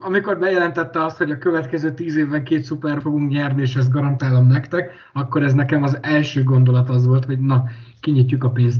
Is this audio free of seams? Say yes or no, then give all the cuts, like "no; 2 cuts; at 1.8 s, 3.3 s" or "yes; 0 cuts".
no; 1 cut; at 3.0 s